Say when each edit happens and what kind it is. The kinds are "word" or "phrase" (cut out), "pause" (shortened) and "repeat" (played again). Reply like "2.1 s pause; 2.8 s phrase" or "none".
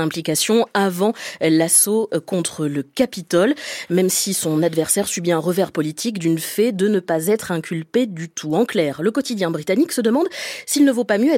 none